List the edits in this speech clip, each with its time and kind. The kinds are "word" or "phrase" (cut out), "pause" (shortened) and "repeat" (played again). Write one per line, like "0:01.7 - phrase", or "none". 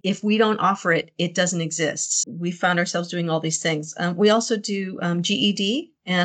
0:02.2 - word